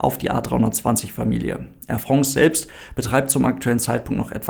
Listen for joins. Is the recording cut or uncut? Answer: uncut